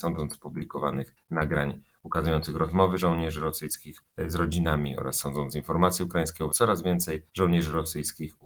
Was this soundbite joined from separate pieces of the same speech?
yes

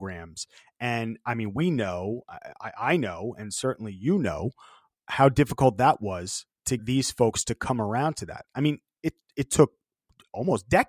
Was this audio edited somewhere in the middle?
yes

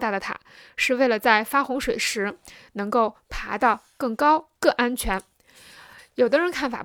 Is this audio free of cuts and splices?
no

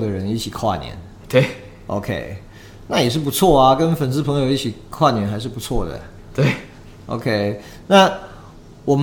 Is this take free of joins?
yes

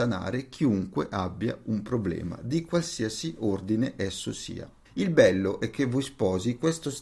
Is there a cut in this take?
yes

